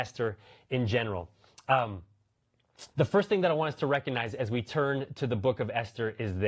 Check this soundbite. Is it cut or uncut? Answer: cut